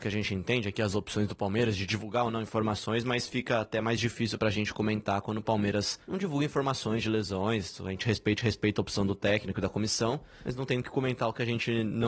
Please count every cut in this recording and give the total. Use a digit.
2